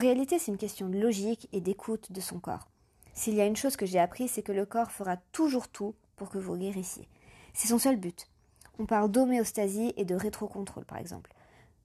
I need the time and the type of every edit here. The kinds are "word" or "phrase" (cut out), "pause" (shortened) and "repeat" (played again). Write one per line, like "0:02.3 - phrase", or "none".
none